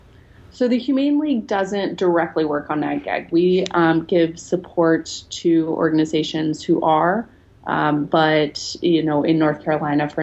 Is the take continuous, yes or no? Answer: yes